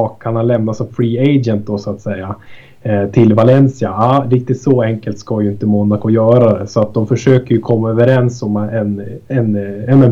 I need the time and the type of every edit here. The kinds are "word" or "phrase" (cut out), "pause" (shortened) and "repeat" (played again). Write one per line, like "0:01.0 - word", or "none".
none